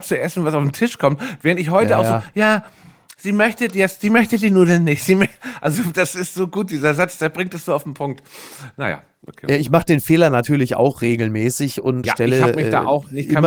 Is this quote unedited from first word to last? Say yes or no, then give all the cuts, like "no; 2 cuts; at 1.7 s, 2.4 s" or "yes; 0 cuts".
no; 1 cut; at 12.0 s